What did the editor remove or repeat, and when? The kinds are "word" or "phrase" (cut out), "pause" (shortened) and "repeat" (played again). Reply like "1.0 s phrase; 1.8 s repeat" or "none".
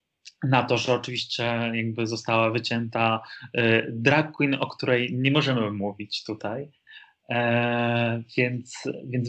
none